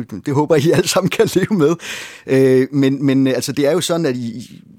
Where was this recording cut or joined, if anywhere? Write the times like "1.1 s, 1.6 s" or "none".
none